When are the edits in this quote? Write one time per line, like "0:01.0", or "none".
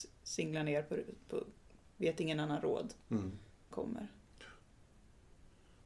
0:01.2
0:01.8
0:03.7